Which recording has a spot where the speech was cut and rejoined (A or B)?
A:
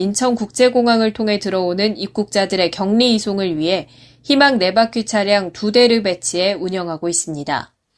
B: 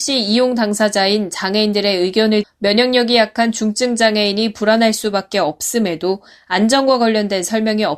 B